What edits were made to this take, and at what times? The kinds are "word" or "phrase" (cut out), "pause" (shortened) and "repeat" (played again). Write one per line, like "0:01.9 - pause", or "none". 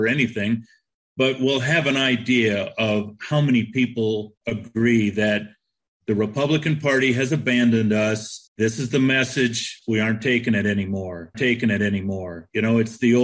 0:04.4 - pause
0:08.5 - pause
0:11.3 - repeat